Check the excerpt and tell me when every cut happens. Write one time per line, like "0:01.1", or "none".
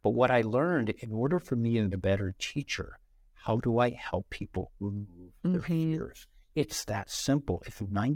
0:01.0
0:01.9